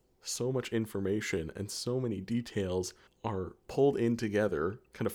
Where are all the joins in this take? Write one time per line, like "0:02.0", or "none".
0:03.1